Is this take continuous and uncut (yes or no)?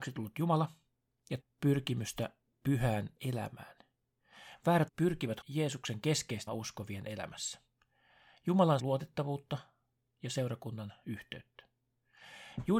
no